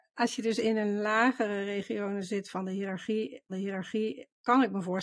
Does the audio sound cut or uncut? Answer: cut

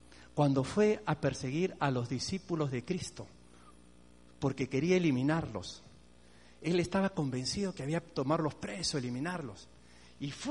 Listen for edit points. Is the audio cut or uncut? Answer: uncut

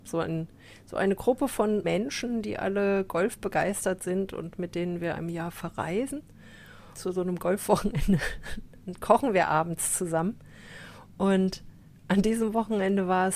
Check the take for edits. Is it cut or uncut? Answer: cut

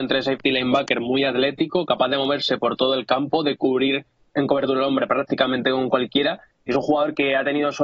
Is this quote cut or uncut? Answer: uncut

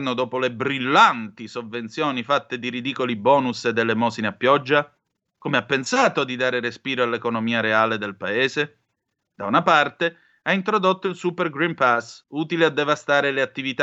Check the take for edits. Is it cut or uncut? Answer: uncut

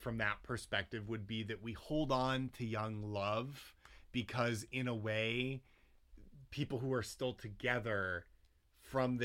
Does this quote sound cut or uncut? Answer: uncut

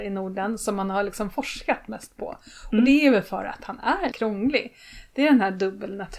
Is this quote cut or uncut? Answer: cut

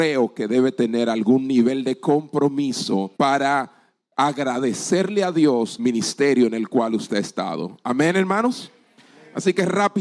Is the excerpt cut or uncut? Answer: cut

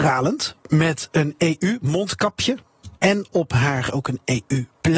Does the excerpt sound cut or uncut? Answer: cut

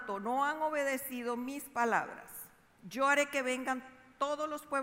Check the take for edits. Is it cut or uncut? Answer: uncut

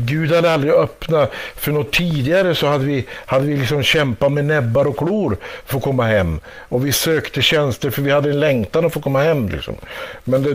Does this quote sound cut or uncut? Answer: cut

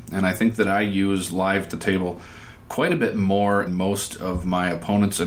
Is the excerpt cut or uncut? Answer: cut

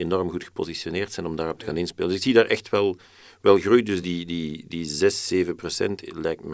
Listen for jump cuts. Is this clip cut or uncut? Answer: uncut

